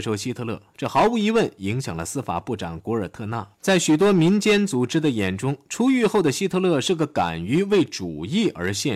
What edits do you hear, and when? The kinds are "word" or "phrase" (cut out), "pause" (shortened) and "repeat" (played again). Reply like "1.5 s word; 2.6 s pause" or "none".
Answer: 3.5 s pause